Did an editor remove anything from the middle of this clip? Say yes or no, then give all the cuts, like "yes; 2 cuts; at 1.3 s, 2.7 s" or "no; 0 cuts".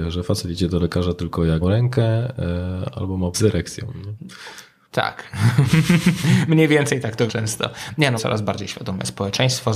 yes; 4 cuts; at 1.6 s, 3.3 s, 7.3 s, 8.2 s